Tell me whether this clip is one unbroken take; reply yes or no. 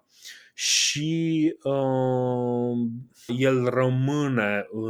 no